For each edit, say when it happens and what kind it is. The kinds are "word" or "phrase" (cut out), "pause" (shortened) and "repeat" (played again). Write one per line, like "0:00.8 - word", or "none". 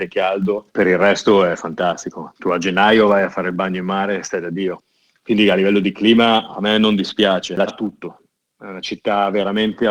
0:07.7 - word